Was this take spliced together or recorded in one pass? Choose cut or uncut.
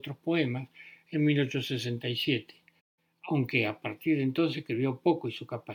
uncut